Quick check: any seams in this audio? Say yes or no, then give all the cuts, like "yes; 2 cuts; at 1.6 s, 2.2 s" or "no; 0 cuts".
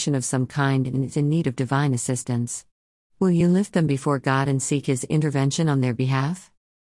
no; 0 cuts